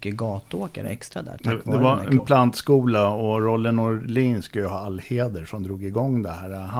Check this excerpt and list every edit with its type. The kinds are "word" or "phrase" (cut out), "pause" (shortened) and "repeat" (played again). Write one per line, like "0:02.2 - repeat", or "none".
0:02.2 - word